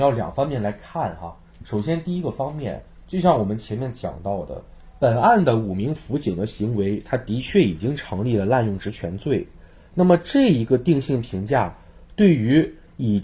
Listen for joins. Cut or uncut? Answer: uncut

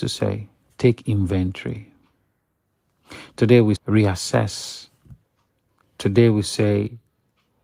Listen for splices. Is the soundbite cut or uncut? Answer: cut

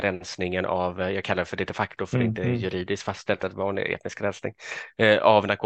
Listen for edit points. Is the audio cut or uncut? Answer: uncut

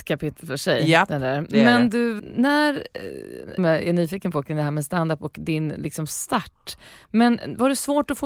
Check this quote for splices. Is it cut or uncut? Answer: cut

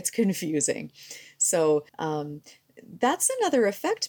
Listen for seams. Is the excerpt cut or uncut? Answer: cut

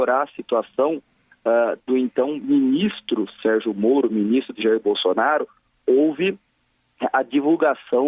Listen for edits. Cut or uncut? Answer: uncut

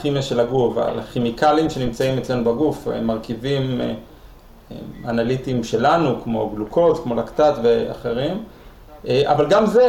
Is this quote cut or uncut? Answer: uncut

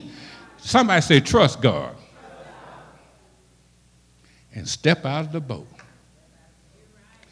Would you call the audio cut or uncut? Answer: uncut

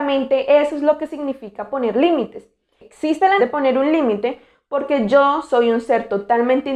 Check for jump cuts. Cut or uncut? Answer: cut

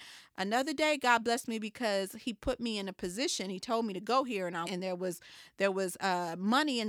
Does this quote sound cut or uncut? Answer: cut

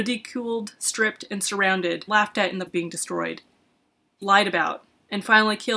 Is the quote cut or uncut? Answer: cut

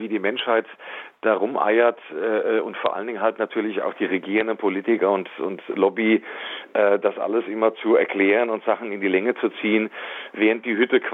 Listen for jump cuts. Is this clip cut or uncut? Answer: uncut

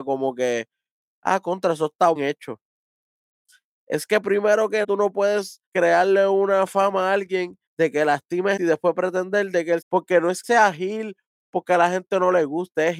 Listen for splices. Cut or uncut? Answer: cut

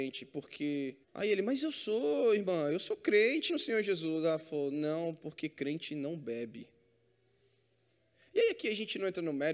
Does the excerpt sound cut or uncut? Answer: cut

